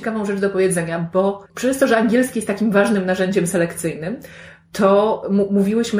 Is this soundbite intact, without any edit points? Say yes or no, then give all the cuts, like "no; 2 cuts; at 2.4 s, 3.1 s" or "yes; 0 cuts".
no; 1 cut; at 1.5 s